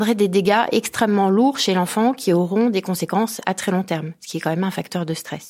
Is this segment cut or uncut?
uncut